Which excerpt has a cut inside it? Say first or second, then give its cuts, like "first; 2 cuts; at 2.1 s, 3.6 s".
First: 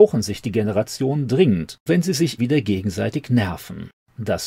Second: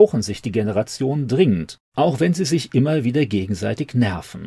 first; 2 cuts; at 1.9 s, 2.4 s